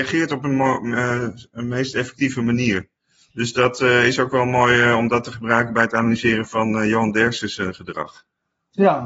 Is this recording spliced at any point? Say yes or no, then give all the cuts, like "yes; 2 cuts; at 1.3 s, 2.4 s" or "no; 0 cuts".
yes; 1 cut; at 3.3 s